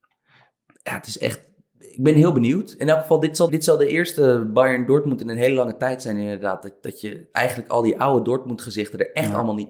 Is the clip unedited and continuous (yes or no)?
no